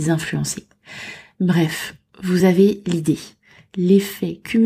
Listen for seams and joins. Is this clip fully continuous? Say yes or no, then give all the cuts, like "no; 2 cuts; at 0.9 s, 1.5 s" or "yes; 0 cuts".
yes; 0 cuts